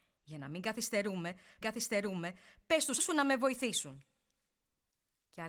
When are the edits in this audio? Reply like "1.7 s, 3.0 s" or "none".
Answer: 1.6 s, 3.0 s